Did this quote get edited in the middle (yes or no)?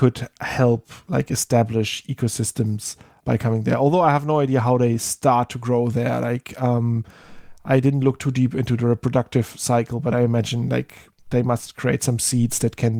yes